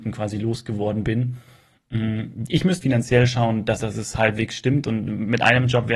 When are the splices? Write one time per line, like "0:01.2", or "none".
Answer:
0:02.8
0:03.8